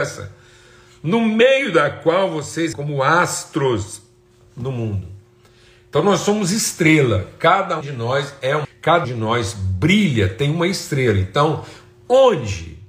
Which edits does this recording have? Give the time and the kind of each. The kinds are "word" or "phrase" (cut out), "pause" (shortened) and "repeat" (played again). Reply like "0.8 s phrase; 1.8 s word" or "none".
2.7 s word; 7.8 s word; 8.6 s word; 9.0 s word